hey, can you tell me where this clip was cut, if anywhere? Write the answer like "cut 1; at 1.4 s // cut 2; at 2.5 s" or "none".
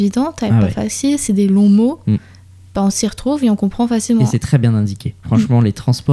none